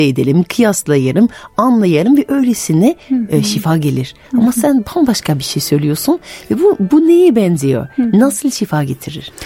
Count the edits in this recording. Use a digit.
1